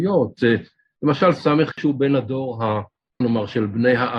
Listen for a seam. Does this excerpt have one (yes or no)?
yes